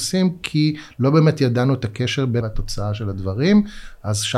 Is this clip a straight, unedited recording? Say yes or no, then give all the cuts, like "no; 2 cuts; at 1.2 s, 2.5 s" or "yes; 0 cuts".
no; 1 cut; at 2.4 s